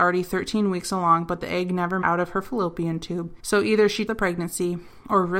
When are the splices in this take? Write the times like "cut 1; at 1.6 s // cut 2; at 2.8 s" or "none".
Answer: cut 1; at 2.0 s // cut 2; at 3.4 s // cut 3; at 4.1 s